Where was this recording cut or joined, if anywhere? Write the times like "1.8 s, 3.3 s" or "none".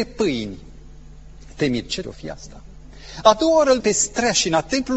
2.0 s, 3.8 s